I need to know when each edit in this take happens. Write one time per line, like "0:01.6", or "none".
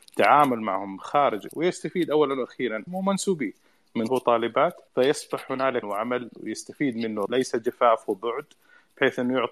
0:01.5
0:02.9
0:04.1
0:04.9
0:05.8
0:07.3